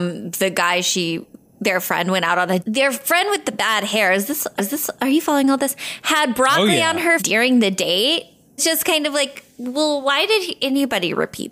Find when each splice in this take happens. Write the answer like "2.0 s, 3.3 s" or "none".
2.6 s, 4.6 s, 7.2 s, 8.6 s